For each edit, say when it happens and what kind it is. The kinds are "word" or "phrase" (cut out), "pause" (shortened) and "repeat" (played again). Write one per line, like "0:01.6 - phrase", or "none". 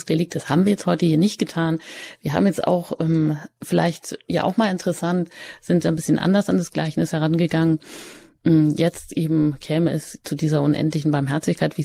none